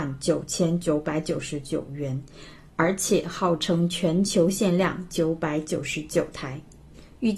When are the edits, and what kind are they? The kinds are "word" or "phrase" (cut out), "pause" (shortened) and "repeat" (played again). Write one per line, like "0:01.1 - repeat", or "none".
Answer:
none